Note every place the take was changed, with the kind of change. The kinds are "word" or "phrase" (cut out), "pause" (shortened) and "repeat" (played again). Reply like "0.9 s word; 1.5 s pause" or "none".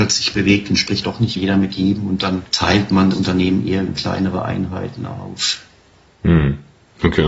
1.0 s word; 1.4 s word; 2.5 s pause; 3.1 s word; 3.9 s word